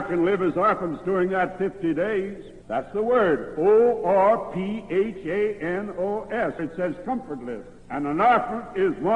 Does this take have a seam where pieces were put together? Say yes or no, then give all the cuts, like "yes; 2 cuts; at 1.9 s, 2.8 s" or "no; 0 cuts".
yes; 3 cuts; at 2.6 s, 6.6 s, 7.8 s